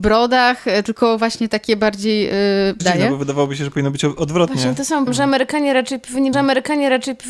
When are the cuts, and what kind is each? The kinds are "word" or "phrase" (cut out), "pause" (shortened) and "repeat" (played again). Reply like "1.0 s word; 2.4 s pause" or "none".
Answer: 2.8 s phrase; 5.1 s word; 6.3 s repeat